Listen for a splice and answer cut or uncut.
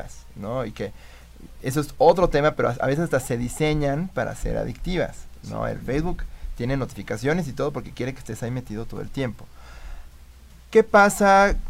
uncut